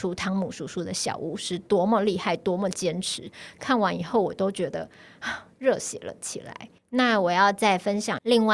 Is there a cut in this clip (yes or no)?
yes